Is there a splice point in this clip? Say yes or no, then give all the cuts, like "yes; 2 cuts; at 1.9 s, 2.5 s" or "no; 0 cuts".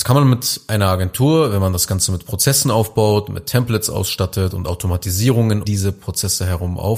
yes; 1 cut; at 5.6 s